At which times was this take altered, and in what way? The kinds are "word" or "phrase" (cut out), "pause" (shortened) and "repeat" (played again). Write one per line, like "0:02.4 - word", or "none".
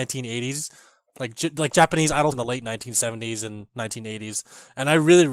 0:02.3 - word